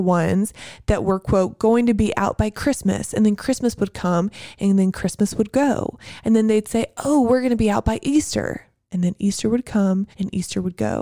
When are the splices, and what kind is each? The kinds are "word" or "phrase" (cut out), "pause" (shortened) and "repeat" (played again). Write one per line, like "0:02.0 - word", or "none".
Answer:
0:10.1 - pause